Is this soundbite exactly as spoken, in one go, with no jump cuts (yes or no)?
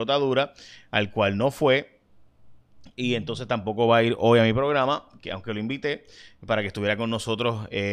yes